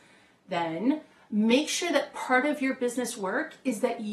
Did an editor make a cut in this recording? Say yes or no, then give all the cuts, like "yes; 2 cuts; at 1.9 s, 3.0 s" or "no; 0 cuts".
no; 0 cuts